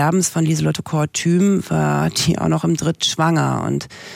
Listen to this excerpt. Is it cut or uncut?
cut